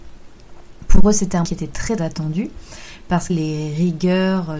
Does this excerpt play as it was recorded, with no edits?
no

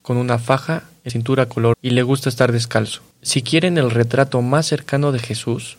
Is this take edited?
yes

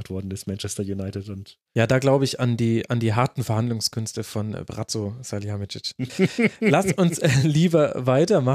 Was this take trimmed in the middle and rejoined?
no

